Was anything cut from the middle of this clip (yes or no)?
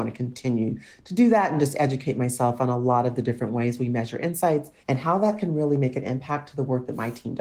yes